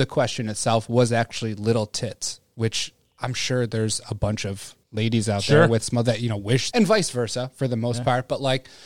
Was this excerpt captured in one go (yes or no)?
no